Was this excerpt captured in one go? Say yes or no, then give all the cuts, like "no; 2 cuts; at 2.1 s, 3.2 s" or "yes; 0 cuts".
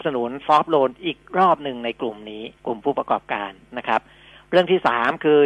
no; 1 cut; at 2.6 s